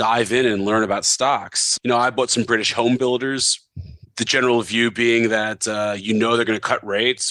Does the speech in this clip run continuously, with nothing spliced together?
yes; 0 cuts

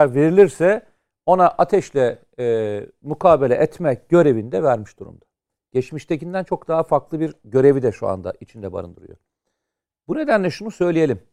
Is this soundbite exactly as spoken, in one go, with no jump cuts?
yes; 0 cuts

